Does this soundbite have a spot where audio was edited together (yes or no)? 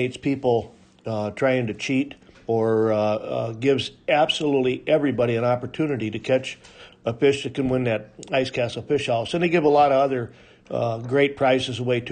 yes